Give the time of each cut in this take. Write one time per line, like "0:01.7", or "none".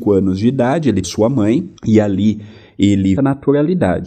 0:01.0
0:01.8
0:03.2